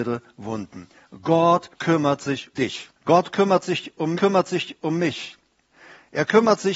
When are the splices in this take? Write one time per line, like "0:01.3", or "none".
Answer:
0:01.7
0:02.5
0:03.0
0:04.1